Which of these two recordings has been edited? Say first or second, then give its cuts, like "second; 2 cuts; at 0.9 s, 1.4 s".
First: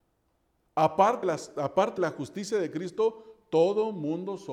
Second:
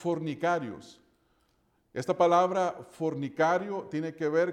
first; 2 cuts; at 1.2 s, 2.0 s